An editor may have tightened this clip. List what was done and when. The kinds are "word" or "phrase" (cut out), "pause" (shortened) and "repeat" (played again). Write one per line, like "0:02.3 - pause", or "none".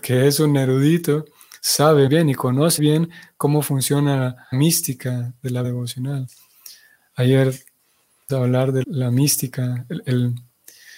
0:02.1 - word
0:02.8 - word
0:04.5 - word
0:05.6 - word
0:08.3 - word
0:08.8 - word